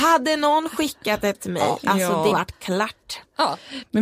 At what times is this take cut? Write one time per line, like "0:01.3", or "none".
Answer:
0:01.3
0:02.3